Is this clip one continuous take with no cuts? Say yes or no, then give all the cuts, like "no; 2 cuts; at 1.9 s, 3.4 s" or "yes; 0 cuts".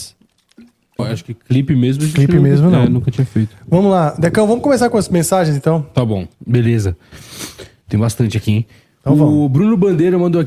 no; 2 cuts; at 1.0 s, 6.3 s